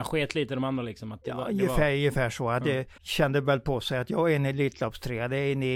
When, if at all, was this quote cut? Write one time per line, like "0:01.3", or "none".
0:03.0